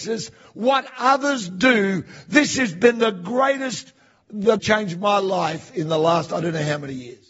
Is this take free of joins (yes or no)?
no